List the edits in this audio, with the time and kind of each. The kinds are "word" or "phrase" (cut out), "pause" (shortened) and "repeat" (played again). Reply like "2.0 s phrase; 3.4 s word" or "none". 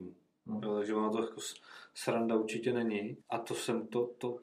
3.2 s pause